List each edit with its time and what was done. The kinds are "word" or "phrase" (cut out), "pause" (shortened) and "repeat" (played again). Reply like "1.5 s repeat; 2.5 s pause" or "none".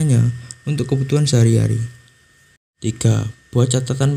none